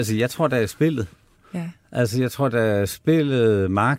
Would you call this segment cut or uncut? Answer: uncut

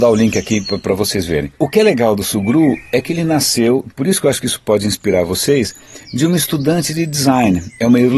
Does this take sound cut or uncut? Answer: cut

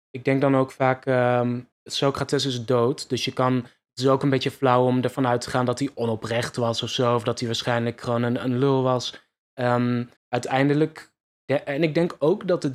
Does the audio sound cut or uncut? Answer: cut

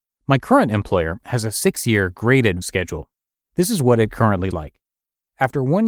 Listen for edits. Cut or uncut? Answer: cut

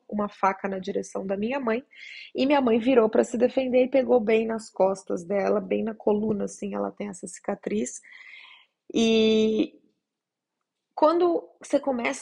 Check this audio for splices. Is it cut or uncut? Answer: uncut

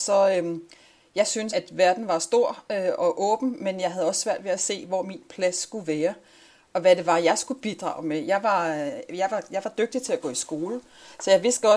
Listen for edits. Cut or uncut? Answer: cut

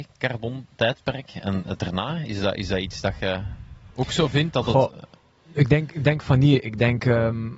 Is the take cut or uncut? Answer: uncut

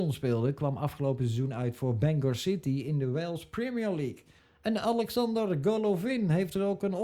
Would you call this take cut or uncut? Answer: cut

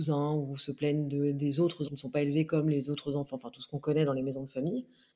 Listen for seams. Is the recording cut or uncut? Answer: cut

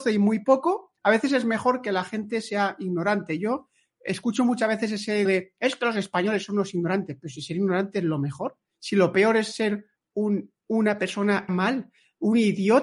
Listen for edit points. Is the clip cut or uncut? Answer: cut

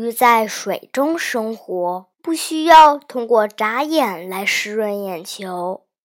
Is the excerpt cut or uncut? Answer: cut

